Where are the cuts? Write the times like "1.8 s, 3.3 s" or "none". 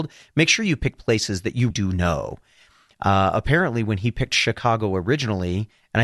1.7 s

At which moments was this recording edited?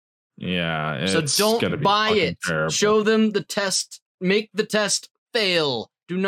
none

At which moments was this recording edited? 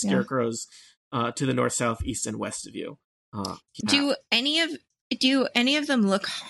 3.8 s

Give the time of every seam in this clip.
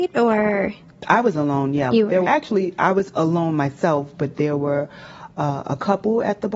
2.2 s

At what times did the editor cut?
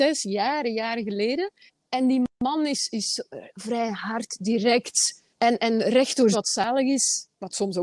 1.7 s, 5.3 s, 6.3 s

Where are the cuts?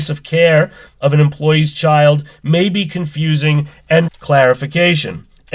4.1 s

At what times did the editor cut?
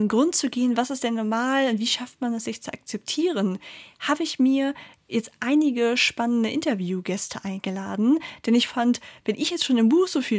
none

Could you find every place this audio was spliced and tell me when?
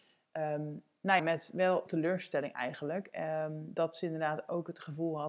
1.2 s, 1.9 s

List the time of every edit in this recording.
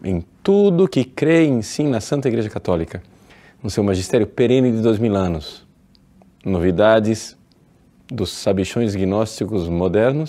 none

